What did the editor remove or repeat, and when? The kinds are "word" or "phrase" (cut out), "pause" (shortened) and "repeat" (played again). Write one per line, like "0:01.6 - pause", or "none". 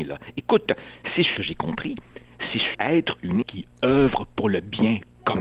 0:01.4 - phrase
0:02.7 - word
0:03.4 - word